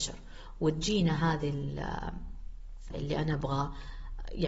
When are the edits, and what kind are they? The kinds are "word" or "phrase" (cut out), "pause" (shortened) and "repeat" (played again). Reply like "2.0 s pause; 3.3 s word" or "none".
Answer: 2.9 s word